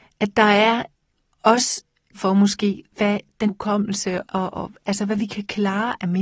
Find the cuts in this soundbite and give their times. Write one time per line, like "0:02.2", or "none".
0:02.1
0:03.5
0:04.2
0:04.5